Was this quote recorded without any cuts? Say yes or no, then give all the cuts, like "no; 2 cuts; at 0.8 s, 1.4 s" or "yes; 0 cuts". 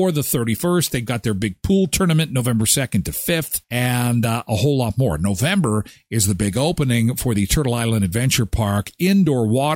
yes; 0 cuts